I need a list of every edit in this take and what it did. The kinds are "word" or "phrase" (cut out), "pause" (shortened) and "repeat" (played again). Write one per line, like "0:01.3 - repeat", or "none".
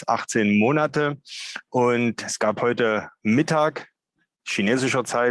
none